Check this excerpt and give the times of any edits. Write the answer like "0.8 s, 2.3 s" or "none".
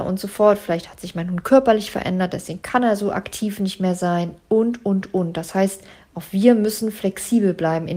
none